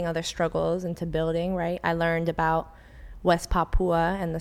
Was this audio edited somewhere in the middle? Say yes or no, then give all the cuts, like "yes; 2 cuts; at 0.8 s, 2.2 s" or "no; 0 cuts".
no; 0 cuts